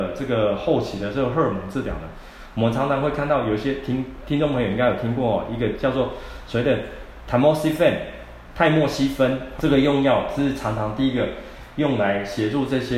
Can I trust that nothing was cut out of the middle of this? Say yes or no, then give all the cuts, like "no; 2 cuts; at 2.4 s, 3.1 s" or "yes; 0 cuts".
no; 1 cut; at 9.6 s